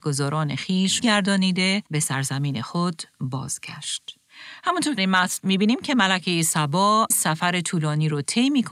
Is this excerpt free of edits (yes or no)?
no